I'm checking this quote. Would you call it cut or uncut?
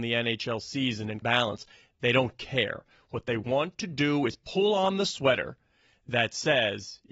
cut